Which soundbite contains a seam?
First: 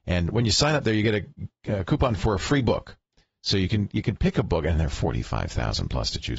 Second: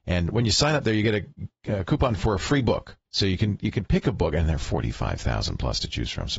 second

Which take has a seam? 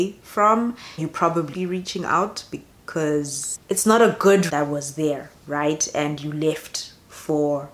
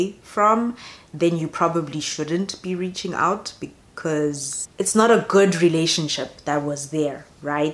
first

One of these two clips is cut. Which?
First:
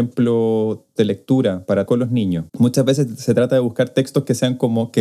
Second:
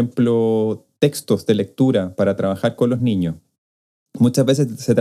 first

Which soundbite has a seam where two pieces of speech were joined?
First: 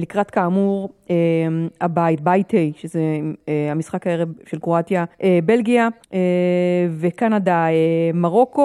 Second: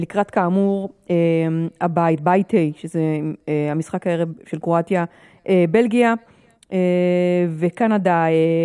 first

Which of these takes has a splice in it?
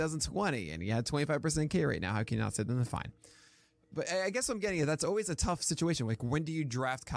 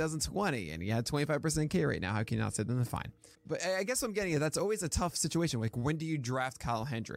second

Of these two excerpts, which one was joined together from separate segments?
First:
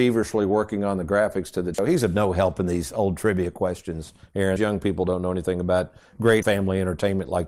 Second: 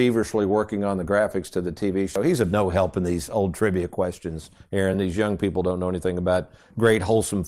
first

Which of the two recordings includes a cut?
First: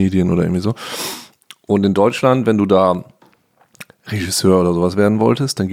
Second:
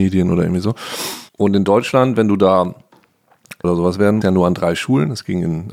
second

